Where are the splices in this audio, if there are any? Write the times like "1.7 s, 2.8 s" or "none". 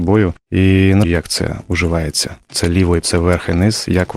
1.0 s, 3.0 s